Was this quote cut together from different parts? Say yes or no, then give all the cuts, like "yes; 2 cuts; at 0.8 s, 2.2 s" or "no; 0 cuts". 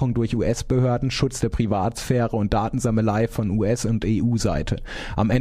no; 0 cuts